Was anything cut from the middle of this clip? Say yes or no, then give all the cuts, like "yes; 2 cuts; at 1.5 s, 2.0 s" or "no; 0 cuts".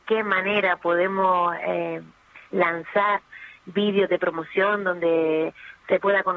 no; 0 cuts